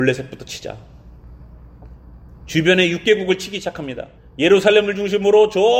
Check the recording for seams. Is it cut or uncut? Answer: cut